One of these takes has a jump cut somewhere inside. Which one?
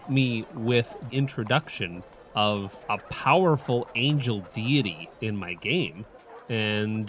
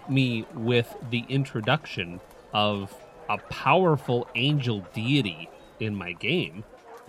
first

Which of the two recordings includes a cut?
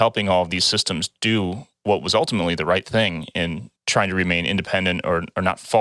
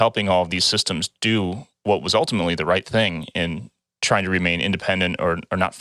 first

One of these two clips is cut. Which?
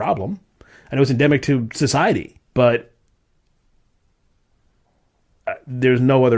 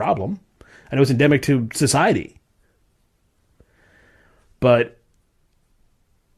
first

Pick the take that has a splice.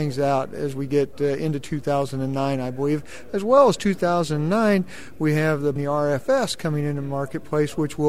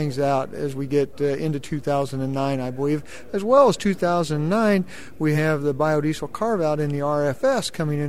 first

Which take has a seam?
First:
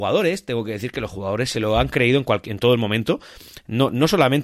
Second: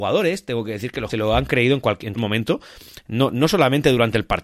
second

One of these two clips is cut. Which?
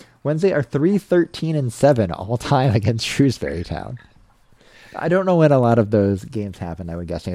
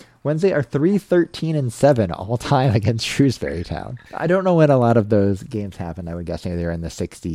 second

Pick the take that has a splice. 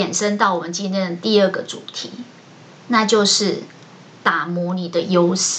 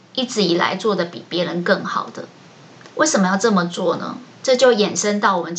second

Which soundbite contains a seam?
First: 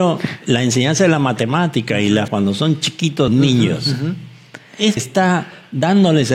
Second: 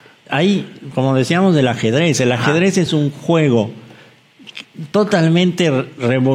first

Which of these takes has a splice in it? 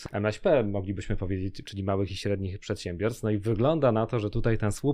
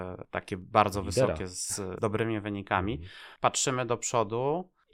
second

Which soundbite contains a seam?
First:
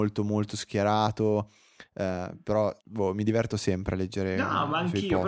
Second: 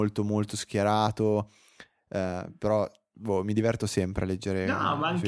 first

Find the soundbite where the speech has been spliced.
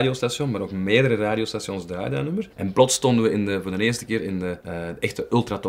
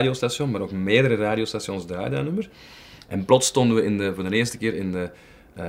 first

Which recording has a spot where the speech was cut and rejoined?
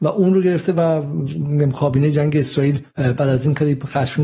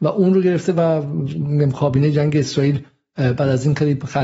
first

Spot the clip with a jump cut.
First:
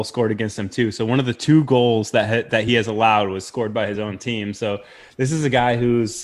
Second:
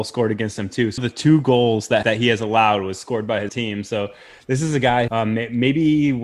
second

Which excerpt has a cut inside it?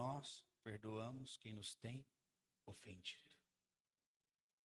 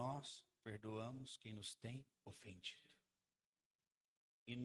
second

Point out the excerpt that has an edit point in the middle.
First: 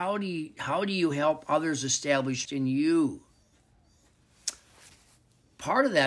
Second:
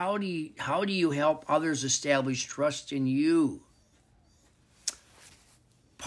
first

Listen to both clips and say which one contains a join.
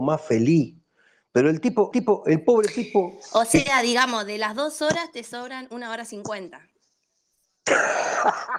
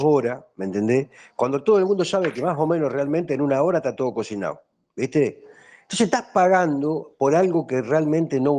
first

